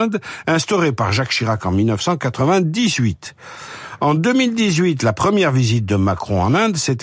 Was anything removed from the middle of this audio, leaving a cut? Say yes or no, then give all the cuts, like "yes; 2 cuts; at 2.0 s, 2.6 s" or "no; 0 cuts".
no; 0 cuts